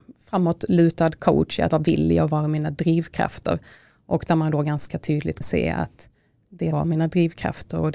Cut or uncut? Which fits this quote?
cut